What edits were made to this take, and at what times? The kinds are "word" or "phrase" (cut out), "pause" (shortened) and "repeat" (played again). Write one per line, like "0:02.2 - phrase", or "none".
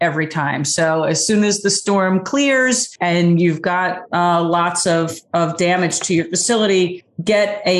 none